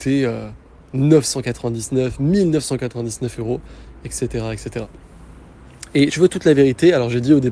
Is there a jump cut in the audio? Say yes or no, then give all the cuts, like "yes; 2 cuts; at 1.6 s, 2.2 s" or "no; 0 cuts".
yes; 1 cut; at 6.1 s